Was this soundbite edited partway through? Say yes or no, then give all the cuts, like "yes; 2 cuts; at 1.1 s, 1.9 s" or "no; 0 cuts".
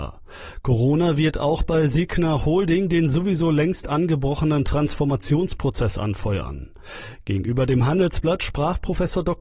no; 0 cuts